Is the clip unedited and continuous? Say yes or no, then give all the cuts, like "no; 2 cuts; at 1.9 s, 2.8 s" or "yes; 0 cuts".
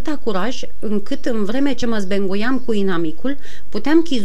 yes; 0 cuts